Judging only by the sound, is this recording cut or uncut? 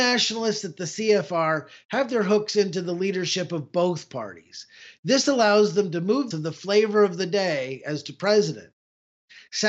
cut